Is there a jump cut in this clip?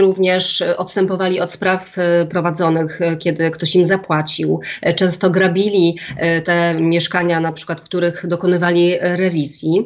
no; 0 cuts

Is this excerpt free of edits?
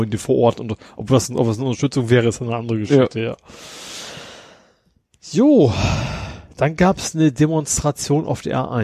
yes; 0 cuts

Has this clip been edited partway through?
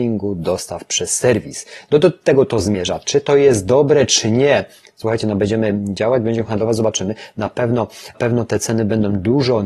yes; 1 cut; at 8.1 s

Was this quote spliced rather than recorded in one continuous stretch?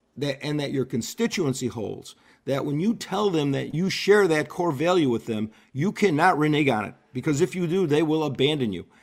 no; 0 cuts

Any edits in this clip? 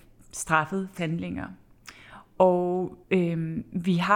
yes; 2 cuts; at 1.0 s, 3.0 s

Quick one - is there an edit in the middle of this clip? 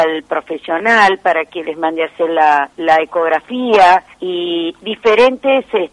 yes; 2 cuts; at 2.7 s, 4.1 s

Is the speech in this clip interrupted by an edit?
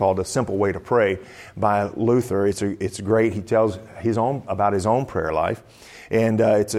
no; 0 cuts

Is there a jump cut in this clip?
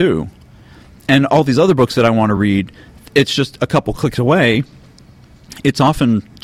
no; 0 cuts

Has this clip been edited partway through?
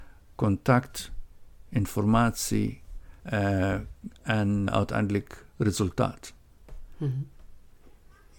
yes; 2 cuts; at 3.2 s, 4.7 s

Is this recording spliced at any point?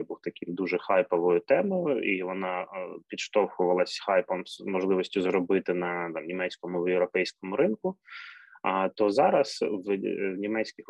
no; 0 cuts

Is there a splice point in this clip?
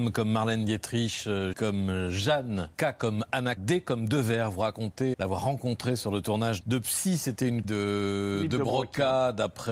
yes; 6 cuts; at 1.5 s, 2.7 s, 3.6 s, 5.1 s, 6.6 s, 7.6 s

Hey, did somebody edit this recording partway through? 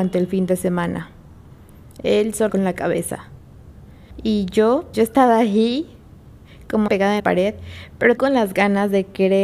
yes; 5 cuts; at 2.5 s, 4.9 s, 6.9 s, 7.2 s, 8.2 s

